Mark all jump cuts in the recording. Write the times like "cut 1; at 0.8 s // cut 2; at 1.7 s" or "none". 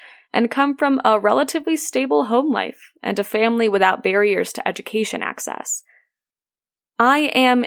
none